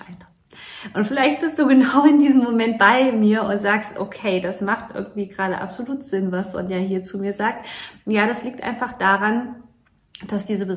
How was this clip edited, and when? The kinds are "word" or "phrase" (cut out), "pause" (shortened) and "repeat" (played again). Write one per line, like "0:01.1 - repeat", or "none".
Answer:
none

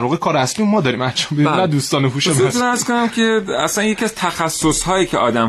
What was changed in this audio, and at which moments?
none

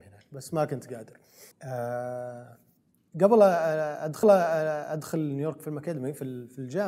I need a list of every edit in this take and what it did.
0:01.5 - pause
0:04.2 - repeat

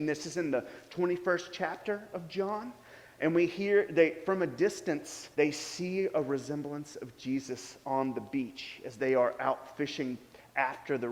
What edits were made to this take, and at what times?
0:05.3 - pause

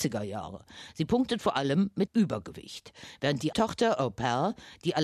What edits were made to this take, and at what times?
0:02.1 - word
0:03.5 - word

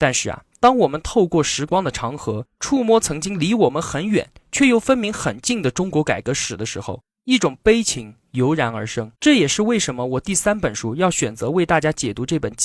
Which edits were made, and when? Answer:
0:09.1 - pause

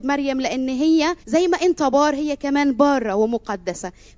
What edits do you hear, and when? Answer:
0:01.2 - pause

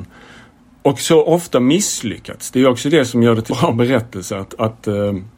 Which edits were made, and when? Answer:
0:03.5 - word

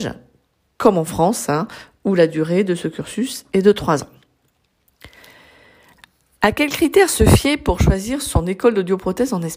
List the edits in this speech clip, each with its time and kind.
none

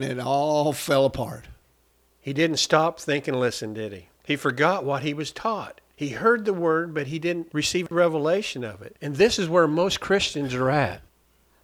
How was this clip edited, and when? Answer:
0:04.2 - pause

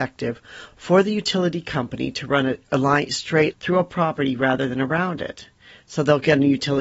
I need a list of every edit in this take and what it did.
0:03.5 - phrase

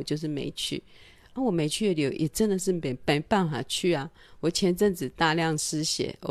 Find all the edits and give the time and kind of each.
none

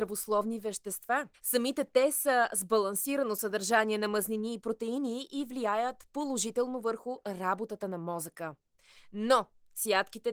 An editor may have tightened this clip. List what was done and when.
0:01.3 - pause

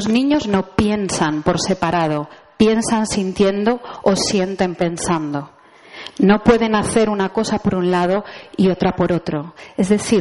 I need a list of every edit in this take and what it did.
none

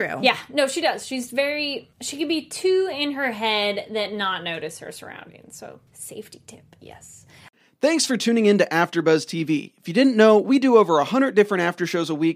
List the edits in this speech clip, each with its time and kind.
0:01.9 - pause
0:05.9 - pause

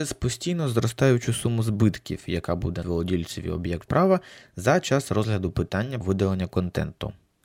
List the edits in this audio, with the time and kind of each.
0:02.8 - word
0:03.9 - word
0:06.0 - word

